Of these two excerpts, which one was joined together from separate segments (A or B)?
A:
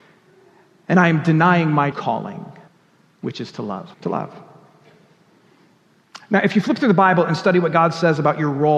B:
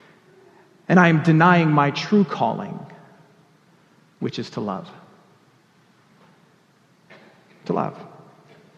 A